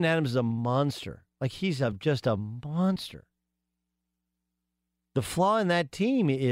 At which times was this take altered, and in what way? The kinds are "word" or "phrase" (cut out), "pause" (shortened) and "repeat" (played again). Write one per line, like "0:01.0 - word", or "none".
none